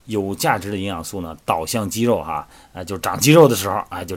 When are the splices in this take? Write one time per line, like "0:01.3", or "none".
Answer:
none

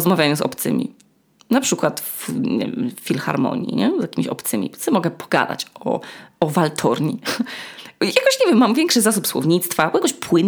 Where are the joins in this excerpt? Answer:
none

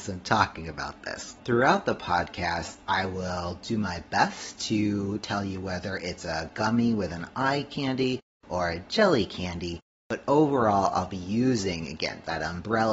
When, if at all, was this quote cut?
0:01.4

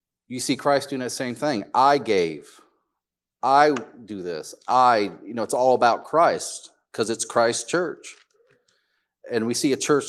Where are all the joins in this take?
none

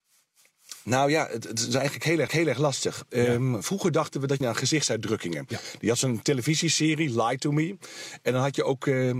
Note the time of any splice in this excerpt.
0:02.3
0:04.4

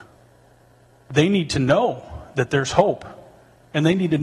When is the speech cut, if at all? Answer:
none

